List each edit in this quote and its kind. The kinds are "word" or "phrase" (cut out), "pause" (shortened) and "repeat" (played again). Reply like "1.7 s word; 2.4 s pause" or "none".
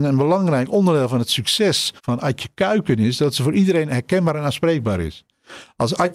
2.0 s pause